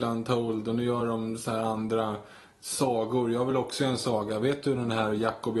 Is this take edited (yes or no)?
no